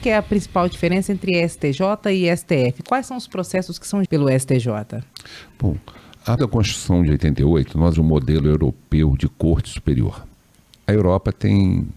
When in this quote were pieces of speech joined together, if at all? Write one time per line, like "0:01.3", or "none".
0:04.1
0:06.4
0:07.9